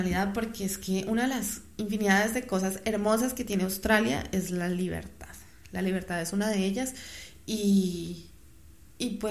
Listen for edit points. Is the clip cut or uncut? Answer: uncut